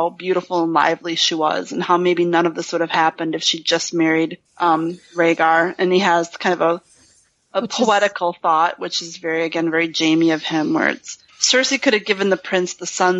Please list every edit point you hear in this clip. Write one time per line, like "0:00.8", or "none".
0:04.5
0:11.3